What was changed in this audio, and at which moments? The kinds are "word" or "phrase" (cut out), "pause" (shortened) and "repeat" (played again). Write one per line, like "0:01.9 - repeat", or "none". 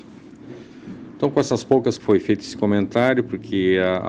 0:02.0 - word